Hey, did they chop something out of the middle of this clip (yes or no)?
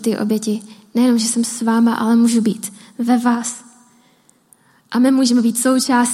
no